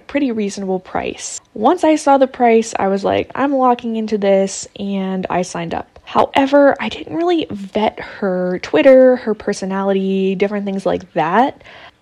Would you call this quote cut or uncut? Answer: uncut